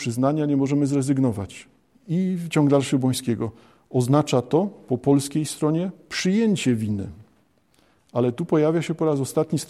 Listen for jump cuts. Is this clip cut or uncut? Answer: uncut